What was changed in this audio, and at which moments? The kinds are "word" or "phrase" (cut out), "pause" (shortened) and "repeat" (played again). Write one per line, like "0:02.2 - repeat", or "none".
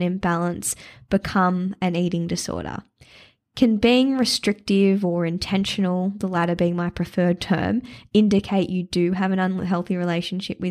none